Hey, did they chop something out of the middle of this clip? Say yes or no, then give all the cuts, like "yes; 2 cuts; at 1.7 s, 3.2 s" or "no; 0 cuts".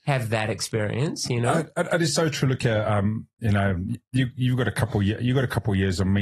no; 0 cuts